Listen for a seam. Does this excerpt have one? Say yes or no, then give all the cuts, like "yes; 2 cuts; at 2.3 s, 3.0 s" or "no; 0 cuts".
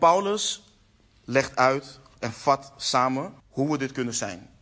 yes; 1 cut; at 3.4 s